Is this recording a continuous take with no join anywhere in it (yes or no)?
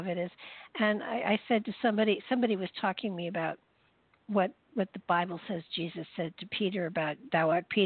yes